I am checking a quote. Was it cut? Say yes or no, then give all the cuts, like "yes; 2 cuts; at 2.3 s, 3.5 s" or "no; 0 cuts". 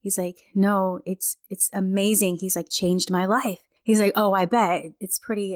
yes; 1 cut; at 2.7 s